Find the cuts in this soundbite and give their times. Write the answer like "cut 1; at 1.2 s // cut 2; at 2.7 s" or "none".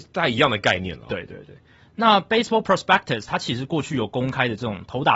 none